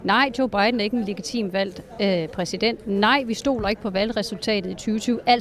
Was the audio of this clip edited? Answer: no; 0 cuts

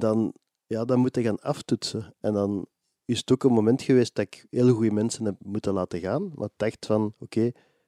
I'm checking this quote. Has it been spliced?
no; 0 cuts

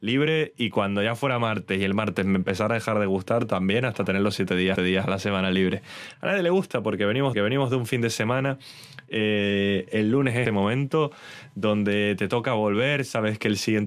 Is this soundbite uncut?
no; 3 cuts; at 4.8 s, 7.3 s, 10.5 s

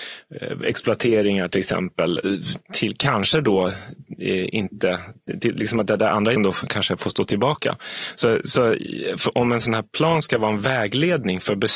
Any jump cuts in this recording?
yes; 2 cuts; at 6.3 s, 9.3 s

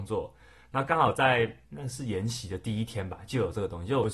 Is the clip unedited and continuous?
no; 1 cut; at 1.6 s

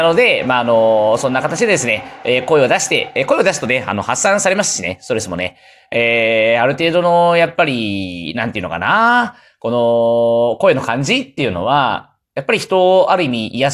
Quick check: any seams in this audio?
no; 0 cuts

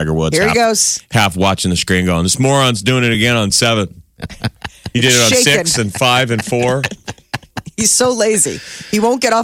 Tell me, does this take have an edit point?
no; 0 cuts

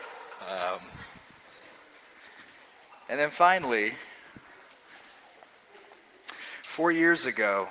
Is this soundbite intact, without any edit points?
yes; 0 cuts

